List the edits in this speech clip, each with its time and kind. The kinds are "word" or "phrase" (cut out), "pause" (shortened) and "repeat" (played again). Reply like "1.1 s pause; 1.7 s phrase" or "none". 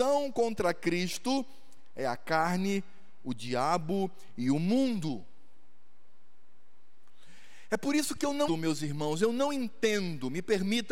8.5 s word